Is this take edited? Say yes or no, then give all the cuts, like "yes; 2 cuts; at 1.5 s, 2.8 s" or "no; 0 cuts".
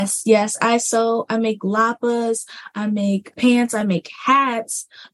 no; 0 cuts